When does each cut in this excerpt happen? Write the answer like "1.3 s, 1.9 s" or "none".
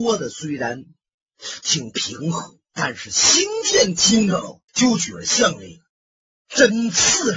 2.6 s, 4.7 s